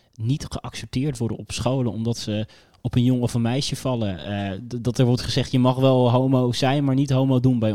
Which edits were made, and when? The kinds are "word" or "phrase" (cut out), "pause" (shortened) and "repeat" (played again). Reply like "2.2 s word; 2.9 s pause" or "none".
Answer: none